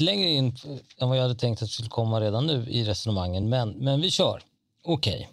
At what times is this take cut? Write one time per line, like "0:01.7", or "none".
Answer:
none